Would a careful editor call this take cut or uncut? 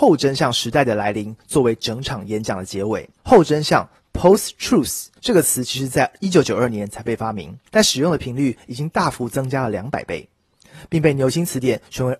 cut